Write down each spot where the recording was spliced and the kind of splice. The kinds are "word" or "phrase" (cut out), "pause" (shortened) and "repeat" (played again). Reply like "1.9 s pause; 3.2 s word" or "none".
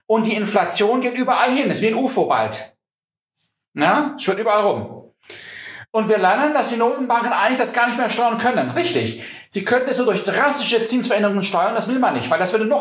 none